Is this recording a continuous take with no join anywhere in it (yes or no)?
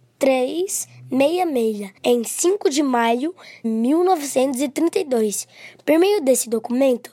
no